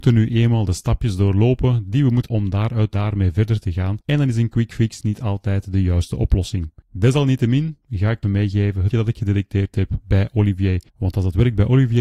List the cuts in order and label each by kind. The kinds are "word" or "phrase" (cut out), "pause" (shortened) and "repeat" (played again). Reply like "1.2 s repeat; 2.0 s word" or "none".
2.3 s word; 2.9 s phrase; 4.0 s pause; 6.8 s pause; 8.2 s word; 8.9 s word; 10.9 s pause